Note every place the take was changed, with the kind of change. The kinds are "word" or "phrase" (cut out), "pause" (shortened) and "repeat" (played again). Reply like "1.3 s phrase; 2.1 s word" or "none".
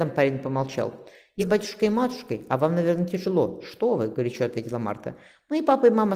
1.4 s word